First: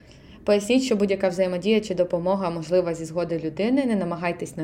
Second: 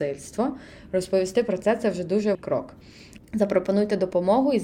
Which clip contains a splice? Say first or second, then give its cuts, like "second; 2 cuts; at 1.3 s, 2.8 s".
second; 1 cut; at 2.3 s